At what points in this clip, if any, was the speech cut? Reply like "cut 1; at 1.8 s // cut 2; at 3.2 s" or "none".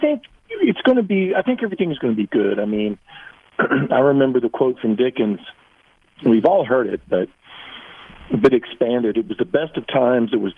none